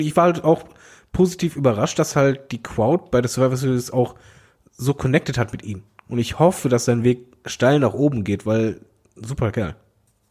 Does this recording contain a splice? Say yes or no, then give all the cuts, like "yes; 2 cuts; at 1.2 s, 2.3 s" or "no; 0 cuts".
no; 0 cuts